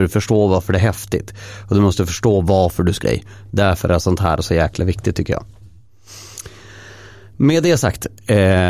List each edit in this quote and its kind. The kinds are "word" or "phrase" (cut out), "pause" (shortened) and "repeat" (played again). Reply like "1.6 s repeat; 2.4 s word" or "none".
3.0 s word